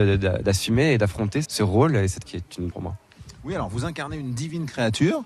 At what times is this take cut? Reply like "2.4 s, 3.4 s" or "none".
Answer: 1.4 s, 2.2 s, 2.7 s